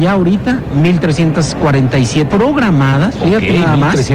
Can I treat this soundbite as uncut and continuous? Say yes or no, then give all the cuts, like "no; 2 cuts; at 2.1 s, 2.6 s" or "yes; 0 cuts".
no; 1 cut; at 2.3 s